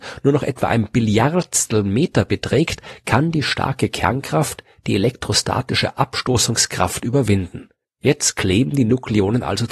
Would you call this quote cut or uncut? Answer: cut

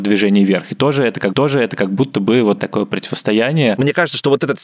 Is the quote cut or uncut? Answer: cut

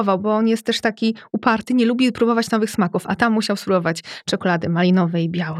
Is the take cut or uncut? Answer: uncut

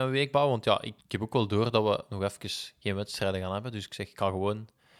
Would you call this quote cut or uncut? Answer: cut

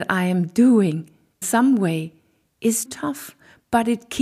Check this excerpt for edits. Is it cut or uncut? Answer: cut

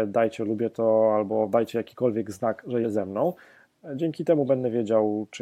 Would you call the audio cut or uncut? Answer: cut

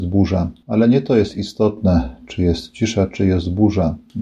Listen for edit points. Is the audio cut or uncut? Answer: uncut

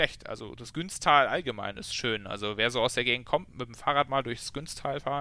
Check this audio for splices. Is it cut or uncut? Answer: uncut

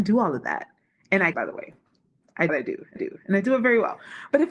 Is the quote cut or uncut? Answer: cut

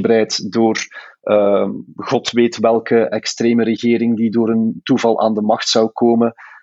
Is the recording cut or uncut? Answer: uncut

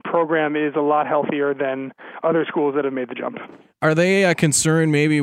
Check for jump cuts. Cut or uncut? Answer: uncut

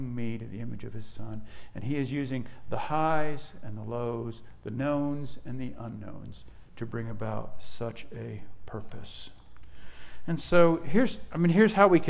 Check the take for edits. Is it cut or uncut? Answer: uncut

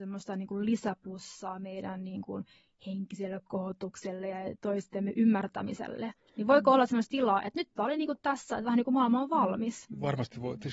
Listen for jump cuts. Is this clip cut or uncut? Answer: uncut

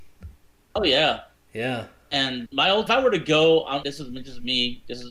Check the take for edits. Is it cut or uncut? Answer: cut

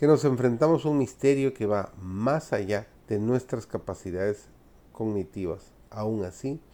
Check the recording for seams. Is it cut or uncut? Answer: cut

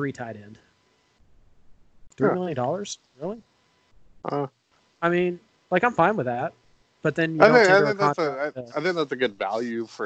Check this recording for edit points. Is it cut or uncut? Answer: uncut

